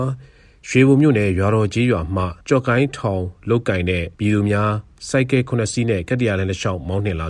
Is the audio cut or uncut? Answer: cut